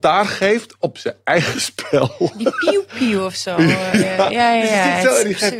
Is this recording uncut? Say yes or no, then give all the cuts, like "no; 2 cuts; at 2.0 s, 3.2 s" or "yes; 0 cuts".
yes; 0 cuts